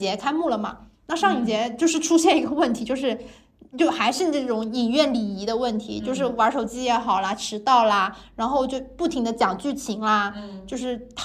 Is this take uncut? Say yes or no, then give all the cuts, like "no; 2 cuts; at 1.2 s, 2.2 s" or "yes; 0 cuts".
yes; 0 cuts